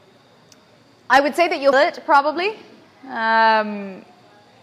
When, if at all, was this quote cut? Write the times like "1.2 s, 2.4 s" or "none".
1.7 s

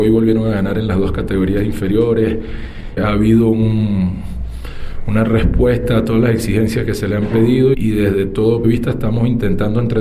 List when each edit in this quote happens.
3.0 s, 7.7 s, 8.6 s

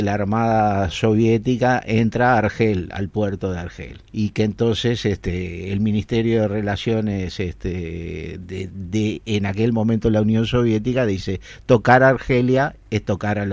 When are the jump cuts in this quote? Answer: 4.1 s

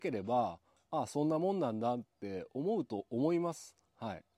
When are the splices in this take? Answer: 2.1 s

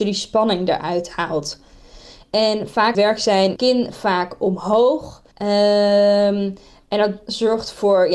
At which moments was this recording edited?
2.9 s, 3.6 s, 5.3 s

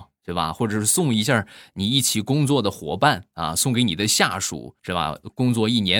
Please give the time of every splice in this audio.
4.8 s

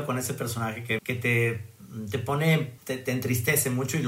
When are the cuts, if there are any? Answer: 1.0 s, 2.8 s

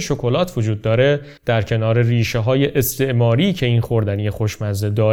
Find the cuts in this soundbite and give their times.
1.4 s

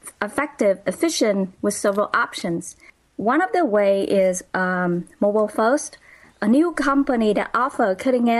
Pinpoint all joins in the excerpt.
none

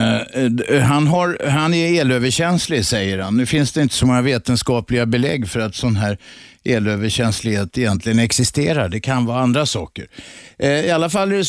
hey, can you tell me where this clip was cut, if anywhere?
none

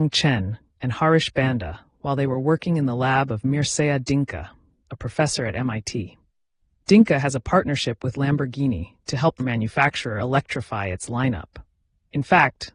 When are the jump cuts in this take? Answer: 9.4 s

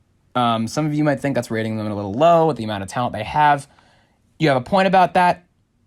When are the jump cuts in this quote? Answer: none

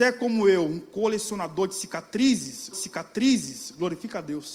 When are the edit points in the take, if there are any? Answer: 2.7 s

